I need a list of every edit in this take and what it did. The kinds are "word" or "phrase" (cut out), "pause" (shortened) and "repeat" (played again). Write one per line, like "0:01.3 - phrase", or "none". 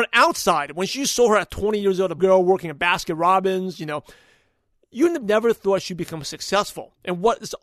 0:02.2 - word
0:05.2 - word